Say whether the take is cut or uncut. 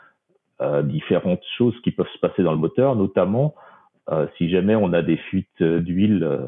uncut